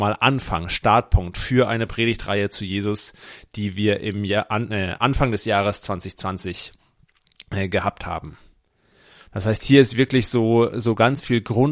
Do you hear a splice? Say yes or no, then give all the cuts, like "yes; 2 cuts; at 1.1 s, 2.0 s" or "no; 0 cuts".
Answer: no; 0 cuts